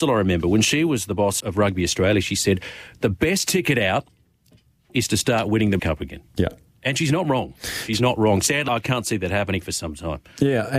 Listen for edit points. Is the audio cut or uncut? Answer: cut